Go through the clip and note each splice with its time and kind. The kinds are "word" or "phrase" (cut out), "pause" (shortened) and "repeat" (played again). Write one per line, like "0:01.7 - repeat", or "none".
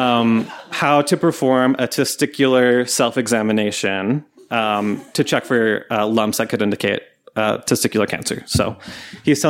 none